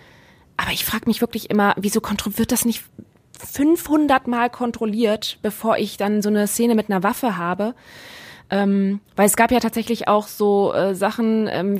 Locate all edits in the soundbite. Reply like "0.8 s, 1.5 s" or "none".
9.1 s